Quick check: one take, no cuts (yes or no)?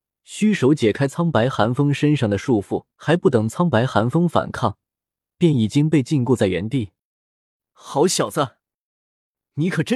no